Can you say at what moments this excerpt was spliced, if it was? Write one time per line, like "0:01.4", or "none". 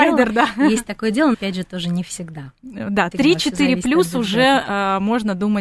0:01.3
0:03.1